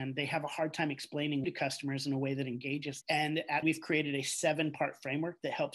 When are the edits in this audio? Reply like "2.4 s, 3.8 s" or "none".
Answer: 1.4 s, 3.0 s, 3.6 s